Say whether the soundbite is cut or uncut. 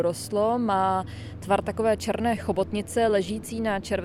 uncut